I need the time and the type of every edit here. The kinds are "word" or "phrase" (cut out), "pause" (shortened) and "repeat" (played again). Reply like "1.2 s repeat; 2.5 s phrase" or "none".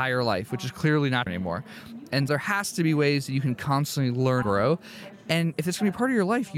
1.3 s word; 2.3 s word; 4.4 s word